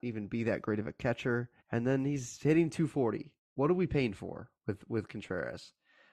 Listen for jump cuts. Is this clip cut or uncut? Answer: cut